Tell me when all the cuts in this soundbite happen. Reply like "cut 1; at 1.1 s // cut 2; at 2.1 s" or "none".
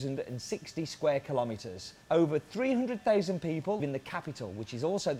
cut 1; at 2.0 s // cut 2; at 3.8 s